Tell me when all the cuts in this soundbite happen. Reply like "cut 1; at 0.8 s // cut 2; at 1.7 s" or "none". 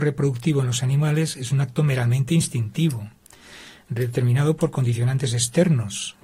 none

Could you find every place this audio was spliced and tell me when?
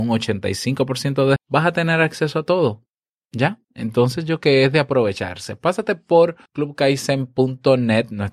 cut 1; at 1.4 s // cut 2; at 3.6 s // cut 3; at 4.4 s // cut 4; at 6.5 s

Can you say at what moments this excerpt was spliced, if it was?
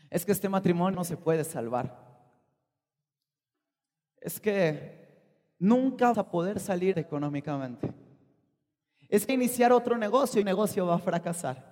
cut 1; at 0.9 s // cut 2; at 6.1 s // cut 3; at 6.9 s // cut 4; at 9.3 s // cut 5; at 10.4 s

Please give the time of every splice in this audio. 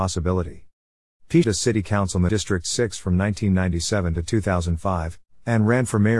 cut 1; at 1.4 s // cut 2; at 2.3 s

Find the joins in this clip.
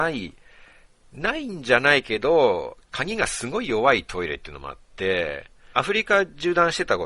cut 1; at 5.7 s

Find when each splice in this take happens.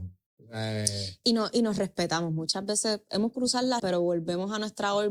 cut 1; at 3.3 s // cut 2; at 3.8 s

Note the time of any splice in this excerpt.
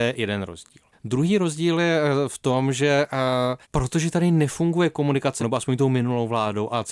cut 1; at 0.9 s // cut 2; at 3.6 s // cut 3; at 5.4 s

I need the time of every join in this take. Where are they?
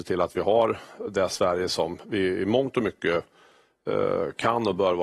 cut 1; at 1.1 s

